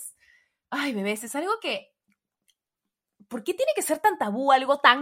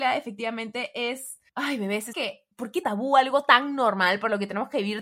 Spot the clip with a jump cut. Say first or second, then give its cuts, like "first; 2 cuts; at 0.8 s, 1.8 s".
second; 4 cuts; at 1.5 s, 2.1 s, 2.5 s, 2.8 s